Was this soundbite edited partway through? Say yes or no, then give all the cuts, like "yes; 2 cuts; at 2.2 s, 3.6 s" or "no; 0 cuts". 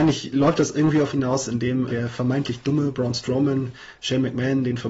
yes; 2 cuts; at 1.1 s, 1.9 s